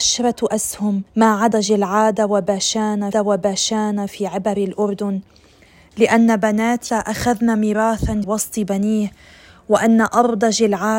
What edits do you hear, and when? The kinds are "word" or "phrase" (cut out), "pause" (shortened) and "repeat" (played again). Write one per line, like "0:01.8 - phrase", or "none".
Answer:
0:01.1 - pause
0:01.5 - word
0:03.1 - repeat
0:06.9 - word
0:08.2 - word

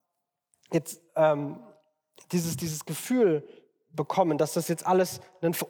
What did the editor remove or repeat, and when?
none

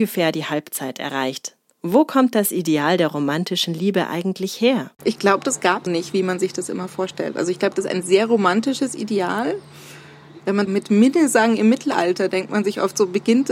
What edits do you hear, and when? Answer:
0:04.9 - pause
0:05.9 - word
0:10.7 - phrase

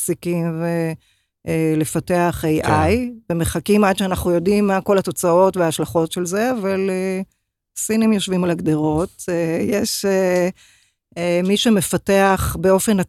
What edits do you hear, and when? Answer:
none

